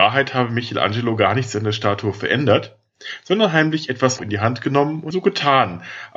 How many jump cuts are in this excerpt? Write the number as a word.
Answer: two